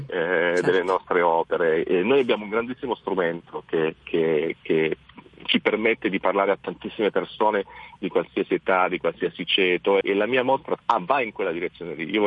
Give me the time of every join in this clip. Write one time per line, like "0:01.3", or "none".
0:10.0
0:10.8